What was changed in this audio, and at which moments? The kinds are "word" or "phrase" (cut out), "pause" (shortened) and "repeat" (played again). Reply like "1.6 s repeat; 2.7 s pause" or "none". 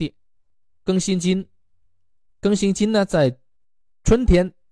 none